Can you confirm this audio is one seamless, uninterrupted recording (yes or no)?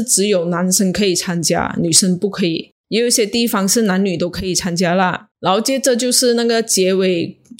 no